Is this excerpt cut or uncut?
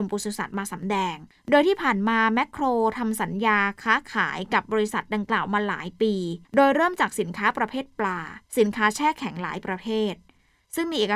cut